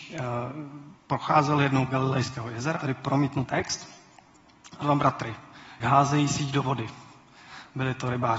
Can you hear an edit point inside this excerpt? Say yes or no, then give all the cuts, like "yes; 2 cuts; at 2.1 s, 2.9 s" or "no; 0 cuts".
yes; 6 cuts; at 1.0 s, 1.9 s, 2.8 s, 3.4 s, 4.8 s, 5.8 s